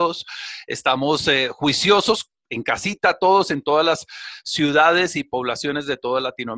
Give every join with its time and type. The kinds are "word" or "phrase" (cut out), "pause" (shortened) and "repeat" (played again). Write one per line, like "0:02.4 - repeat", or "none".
none